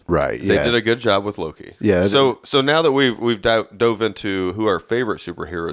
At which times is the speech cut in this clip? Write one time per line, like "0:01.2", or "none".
none